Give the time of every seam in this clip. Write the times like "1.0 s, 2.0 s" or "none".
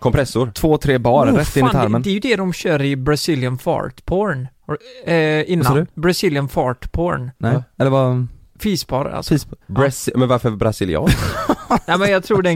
5.9 s, 7.4 s, 9.6 s